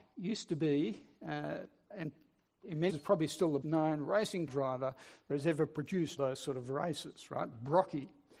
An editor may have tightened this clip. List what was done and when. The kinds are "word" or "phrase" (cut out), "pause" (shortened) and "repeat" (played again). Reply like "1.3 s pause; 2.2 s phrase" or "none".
2.9 s word; 3.6 s word; 4.5 s word; 5.3 s word; 6.2 s word